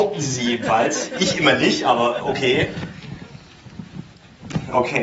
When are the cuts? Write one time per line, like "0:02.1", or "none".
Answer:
none